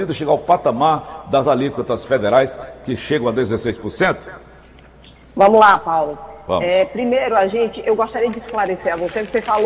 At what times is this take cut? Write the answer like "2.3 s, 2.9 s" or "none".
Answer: none